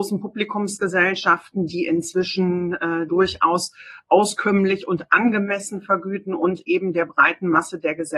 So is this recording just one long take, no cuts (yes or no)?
no